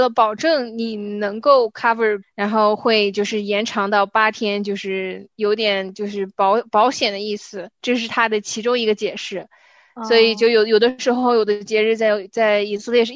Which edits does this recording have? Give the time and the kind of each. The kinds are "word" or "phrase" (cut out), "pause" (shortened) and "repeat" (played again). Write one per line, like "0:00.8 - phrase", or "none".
0:02.2 - phrase